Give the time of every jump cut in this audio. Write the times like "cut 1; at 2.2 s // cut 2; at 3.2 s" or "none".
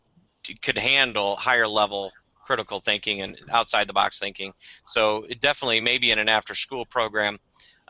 none

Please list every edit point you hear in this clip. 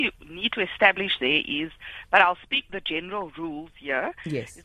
cut 1; at 2.7 s

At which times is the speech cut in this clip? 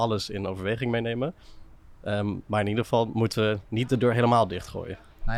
none

